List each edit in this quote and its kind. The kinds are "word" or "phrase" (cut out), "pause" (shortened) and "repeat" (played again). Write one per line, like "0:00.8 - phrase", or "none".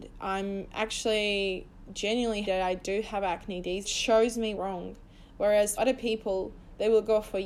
0:02.4 - word
0:03.8 - phrase
0:04.6 - phrase
0:05.8 - word